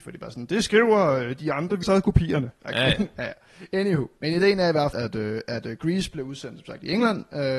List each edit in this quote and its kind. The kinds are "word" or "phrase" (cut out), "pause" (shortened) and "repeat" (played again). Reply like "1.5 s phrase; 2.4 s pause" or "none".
1.8 s phrase; 4.9 s word